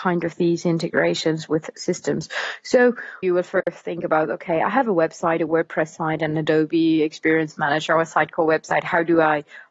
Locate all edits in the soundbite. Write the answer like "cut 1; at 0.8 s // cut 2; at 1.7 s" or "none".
cut 1; at 3.2 s